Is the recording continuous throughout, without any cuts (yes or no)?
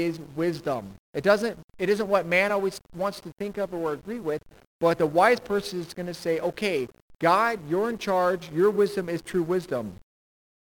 yes